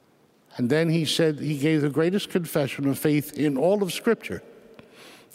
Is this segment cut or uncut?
uncut